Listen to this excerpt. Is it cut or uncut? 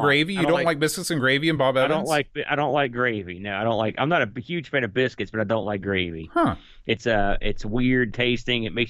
uncut